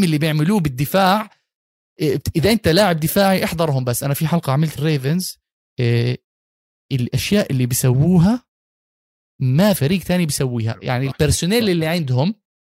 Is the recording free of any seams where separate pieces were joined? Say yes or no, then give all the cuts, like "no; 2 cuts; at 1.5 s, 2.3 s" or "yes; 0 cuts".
no; 2 cuts; at 4.8 s, 9.8 s